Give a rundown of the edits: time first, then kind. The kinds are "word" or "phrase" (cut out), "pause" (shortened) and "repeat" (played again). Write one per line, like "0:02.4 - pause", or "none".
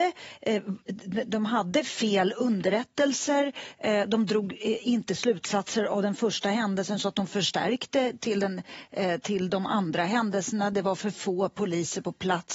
none